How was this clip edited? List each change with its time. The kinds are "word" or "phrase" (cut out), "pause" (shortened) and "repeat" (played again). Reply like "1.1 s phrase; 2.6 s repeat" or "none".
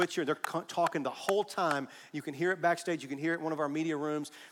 none